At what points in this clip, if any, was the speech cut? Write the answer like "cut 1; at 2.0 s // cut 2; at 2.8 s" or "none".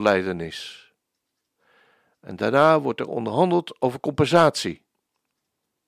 none